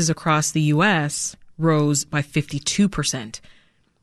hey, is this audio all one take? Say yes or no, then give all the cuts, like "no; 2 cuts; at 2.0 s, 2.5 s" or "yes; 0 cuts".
yes; 0 cuts